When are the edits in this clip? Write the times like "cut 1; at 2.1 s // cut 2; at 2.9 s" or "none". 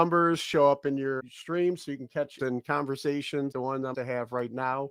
cut 1; at 1.2 s // cut 2; at 2.4 s // cut 3; at 3.5 s // cut 4; at 3.9 s